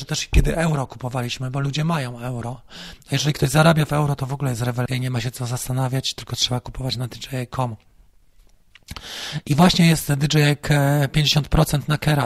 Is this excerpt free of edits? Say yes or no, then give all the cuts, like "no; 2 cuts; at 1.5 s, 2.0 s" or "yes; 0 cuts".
yes; 0 cuts